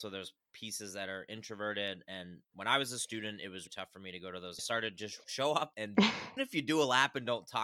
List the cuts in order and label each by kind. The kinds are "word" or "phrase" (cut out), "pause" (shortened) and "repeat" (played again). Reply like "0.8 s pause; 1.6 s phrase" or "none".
3.7 s word; 4.6 s phrase; 5.7 s word; 6.4 s word